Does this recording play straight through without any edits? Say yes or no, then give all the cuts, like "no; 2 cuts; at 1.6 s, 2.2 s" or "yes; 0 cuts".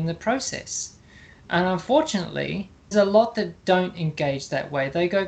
no; 1 cut; at 2.9 s